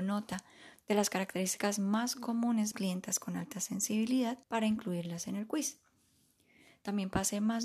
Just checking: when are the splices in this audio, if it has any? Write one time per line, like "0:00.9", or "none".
0:02.7
0:04.4